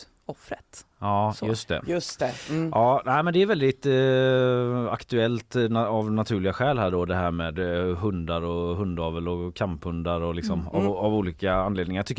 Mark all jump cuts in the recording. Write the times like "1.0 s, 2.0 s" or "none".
none